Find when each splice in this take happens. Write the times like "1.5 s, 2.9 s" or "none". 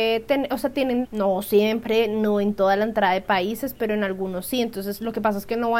1.0 s